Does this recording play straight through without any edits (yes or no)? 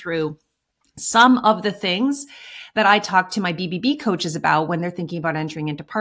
yes